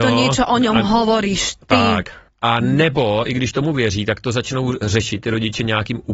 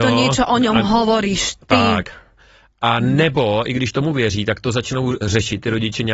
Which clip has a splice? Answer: first; 1 cut; at 2.3 s

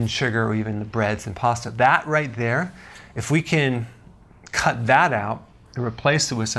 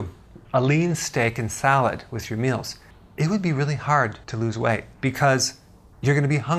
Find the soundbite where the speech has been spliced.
second; 3 cuts; at 2.9 s, 4.2 s, 4.9 s

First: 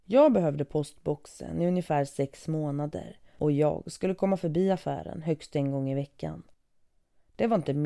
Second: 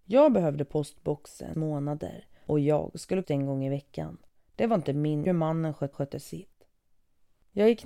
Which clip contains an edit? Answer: second; 5 cuts; at 1.5 s, 3.2 s, 4.4 s, 5.2 s, 5.9 s

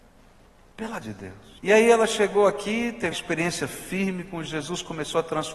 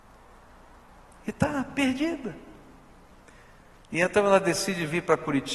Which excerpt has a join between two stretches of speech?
first; 4 cuts; at 1.0 s, 1.6 s, 3.1 s, 4.5 s

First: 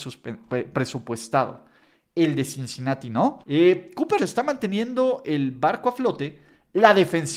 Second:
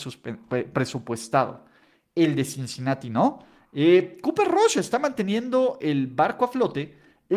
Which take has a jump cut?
first; 2 cuts; at 3.4 s, 4.2 s

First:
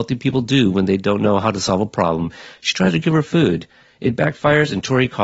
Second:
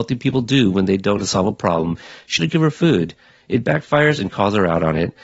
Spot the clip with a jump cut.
second; 3 cuts; at 1.2 s, 2.4 s, 4.3 s

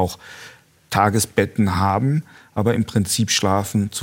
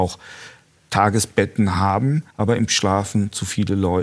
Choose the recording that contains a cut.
second; 2 cuts; at 2.3 s, 2.7 s

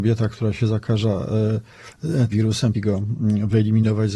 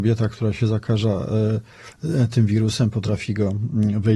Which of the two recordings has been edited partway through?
first; 2 cuts; at 2.3 s, 2.7 s

